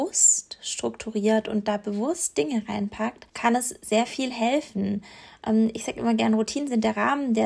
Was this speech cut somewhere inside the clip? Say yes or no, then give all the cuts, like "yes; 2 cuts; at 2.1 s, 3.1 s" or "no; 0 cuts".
yes; 1 cut; at 3.3 s